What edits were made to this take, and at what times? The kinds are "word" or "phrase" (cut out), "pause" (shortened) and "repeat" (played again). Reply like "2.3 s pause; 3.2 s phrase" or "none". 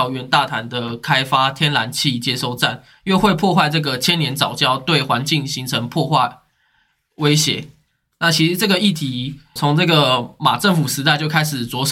9.6 s word